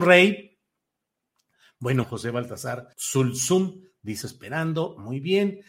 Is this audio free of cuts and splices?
no; 3 cuts; at 2.0 s, 2.9 s, 4.2 s

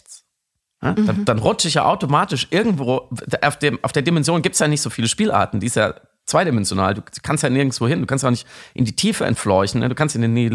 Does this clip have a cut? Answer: no; 0 cuts

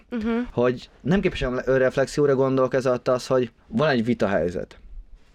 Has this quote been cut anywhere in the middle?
yes; 2 cuts; at 0.9 s, 3.6 s

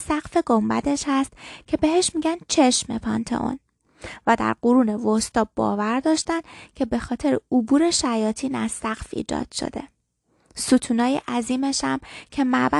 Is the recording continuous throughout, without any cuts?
yes; 0 cuts

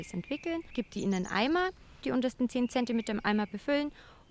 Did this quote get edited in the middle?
no; 0 cuts

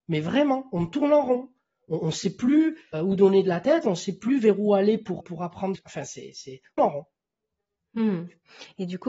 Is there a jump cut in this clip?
yes; 4 cuts; at 2.9 s, 5.2 s, 5.7 s, 6.8 s

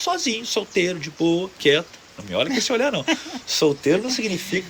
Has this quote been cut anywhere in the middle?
no; 0 cuts

